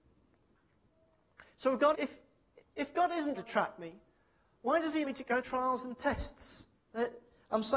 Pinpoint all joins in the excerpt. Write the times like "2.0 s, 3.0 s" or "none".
1.9 s, 3.4 s, 5.0 s, 5.4 s